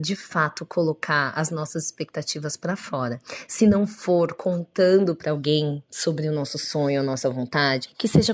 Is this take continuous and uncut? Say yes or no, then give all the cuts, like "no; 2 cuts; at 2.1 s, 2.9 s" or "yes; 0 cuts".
yes; 0 cuts